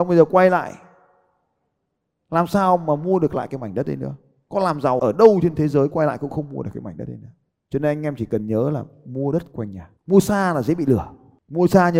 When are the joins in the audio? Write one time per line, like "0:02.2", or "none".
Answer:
0:05.0
0:10.0